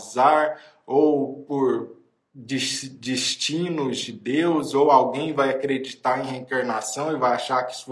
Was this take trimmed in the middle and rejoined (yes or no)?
no